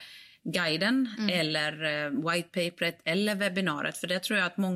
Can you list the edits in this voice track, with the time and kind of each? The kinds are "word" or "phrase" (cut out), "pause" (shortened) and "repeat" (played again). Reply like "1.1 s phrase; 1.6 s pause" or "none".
none